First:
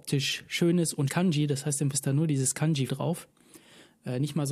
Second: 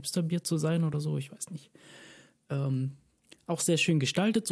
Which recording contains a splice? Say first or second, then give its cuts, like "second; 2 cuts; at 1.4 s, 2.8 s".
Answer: first; 3 cuts; at 1.1 s, 1.9 s, 2.9 s